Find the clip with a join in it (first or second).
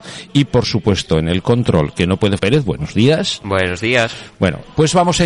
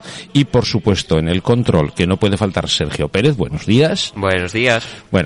first